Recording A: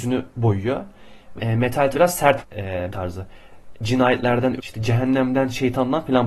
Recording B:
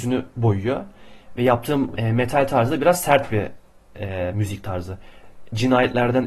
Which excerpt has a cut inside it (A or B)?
A